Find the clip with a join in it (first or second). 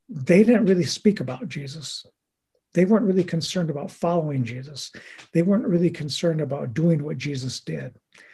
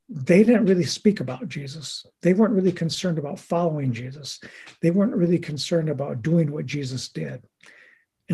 second